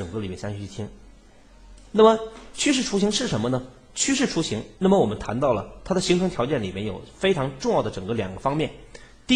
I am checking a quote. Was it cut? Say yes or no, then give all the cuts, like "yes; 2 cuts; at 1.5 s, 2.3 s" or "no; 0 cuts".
yes; 1 cut; at 4.7 s